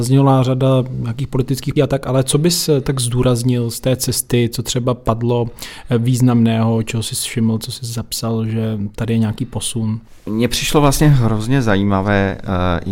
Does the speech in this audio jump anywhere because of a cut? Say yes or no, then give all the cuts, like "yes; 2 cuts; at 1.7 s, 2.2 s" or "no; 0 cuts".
yes; 1 cut; at 1.8 s